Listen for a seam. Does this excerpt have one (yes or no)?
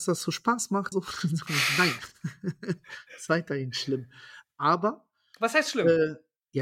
yes